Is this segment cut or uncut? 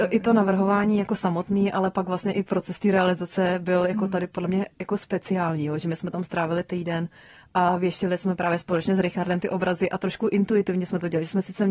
uncut